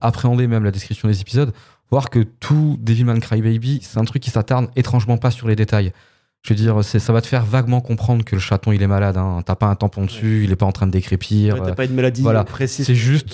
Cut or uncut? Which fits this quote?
uncut